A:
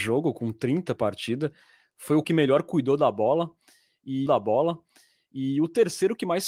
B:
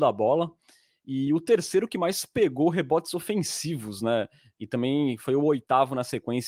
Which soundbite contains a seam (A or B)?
A